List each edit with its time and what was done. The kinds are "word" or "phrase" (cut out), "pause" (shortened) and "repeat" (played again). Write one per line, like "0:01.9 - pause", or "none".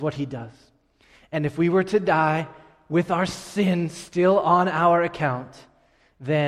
none